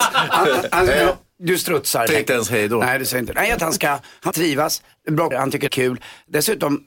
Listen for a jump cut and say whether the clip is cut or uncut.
cut